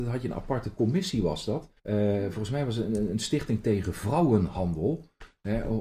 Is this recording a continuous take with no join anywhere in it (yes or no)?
no